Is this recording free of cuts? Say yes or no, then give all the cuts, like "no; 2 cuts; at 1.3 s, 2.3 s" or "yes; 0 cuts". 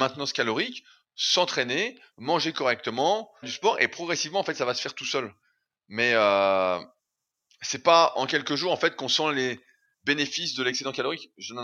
no; 1 cut; at 3.4 s